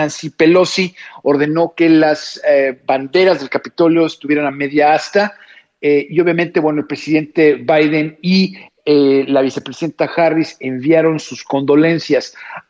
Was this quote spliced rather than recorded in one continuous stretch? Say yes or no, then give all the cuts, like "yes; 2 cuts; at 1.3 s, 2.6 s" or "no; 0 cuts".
no; 0 cuts